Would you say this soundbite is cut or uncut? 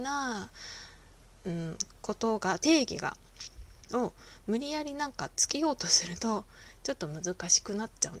uncut